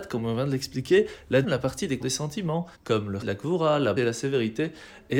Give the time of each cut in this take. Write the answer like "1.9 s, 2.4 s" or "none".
1.4 s, 2.0 s, 2.7 s, 3.2 s, 4.0 s